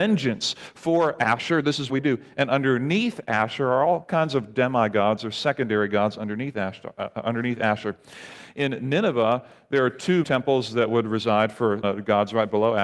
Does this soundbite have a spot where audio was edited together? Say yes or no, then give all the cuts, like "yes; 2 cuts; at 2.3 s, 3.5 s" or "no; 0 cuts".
yes; 3 cuts; at 1.9 s, 10.2 s, 11.8 s